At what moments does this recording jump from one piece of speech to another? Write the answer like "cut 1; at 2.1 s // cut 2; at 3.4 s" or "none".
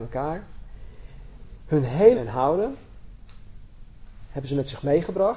cut 1; at 2.1 s